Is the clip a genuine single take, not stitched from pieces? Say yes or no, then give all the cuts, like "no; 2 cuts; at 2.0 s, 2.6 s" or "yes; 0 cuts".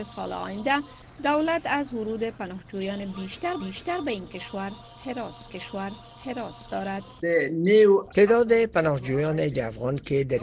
no; 3 cuts; at 3.6 s, 5.5 s, 9.5 s